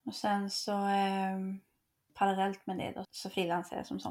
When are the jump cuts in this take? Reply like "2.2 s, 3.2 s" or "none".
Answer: 3.0 s